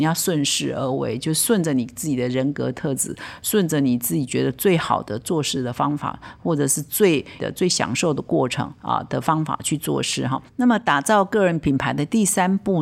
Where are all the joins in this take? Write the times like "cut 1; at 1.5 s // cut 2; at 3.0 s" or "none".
cut 1; at 7.4 s